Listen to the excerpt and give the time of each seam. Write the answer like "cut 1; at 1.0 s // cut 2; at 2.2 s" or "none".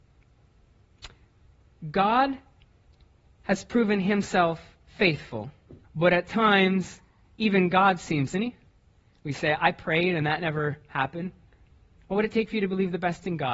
cut 1; at 5.8 s // cut 2; at 8.3 s